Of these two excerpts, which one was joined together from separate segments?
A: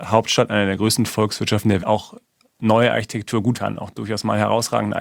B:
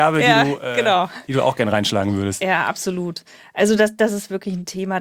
A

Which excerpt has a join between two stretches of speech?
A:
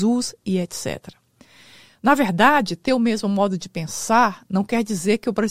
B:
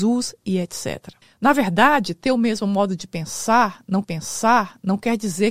B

